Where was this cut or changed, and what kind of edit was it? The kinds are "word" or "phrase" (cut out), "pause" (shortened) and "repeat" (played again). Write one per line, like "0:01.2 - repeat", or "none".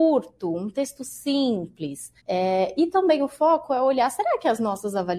0:02.2 - pause